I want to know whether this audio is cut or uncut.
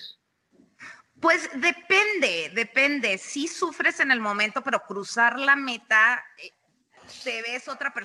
uncut